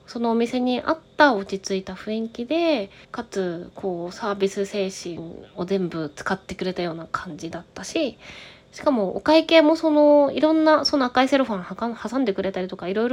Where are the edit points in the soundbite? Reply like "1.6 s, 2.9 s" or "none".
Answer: 3.0 s